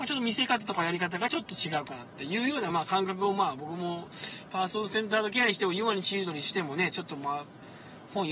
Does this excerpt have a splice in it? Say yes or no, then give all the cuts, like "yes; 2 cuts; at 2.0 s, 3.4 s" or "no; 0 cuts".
no; 0 cuts